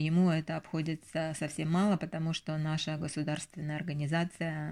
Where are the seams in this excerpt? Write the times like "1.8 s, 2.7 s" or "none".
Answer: none